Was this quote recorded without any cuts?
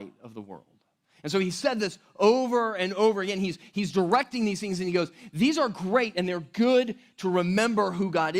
yes; 0 cuts

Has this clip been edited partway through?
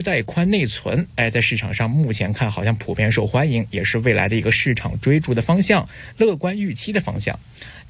no; 0 cuts

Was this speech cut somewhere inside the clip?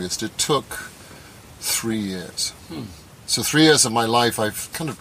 no; 0 cuts

